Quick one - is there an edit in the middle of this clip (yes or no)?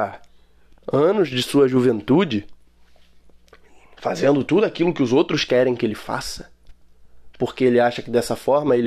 no